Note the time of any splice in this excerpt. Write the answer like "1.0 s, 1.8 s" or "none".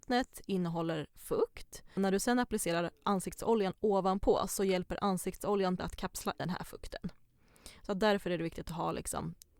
2.0 s, 5.8 s, 6.4 s